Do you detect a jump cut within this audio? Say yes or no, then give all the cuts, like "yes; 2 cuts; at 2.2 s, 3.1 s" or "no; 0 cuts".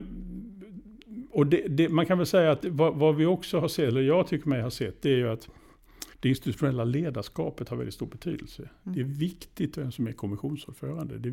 yes; 1 cut; at 6.1 s